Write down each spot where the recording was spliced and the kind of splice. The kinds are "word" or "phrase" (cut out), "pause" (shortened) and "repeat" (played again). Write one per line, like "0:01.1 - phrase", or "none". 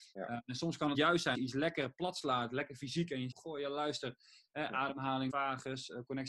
0:00.9 - word
0:01.3 - word
0:03.3 - word
0:05.3 - word